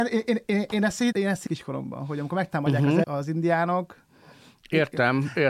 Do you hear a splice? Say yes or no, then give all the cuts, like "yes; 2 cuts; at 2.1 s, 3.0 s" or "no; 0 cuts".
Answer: yes; 3 cuts; at 1.1 s, 1.5 s, 3.0 s